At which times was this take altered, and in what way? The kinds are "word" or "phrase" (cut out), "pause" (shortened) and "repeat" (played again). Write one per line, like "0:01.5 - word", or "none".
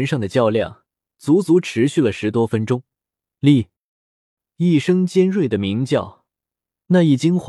none